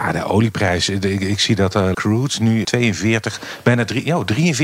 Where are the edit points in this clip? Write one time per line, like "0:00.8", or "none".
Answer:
0:01.9
0:02.6